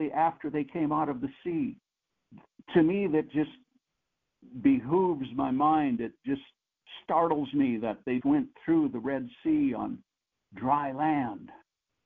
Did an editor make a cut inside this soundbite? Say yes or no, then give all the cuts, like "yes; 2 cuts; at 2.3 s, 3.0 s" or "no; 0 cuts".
yes; 1 cut; at 8.2 s